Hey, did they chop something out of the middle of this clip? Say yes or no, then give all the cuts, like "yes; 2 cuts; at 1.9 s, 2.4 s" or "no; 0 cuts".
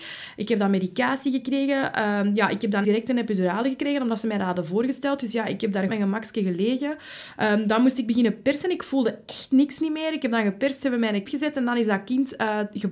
yes; 3 cuts; at 2.8 s, 5.9 s, 11.2 s